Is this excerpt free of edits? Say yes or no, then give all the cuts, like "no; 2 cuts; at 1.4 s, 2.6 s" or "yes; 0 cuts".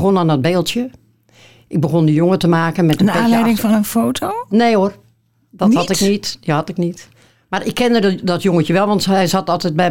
yes; 0 cuts